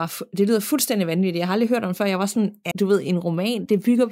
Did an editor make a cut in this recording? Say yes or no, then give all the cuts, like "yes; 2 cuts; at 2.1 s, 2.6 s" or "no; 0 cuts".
yes; 1 cut; at 2.7 s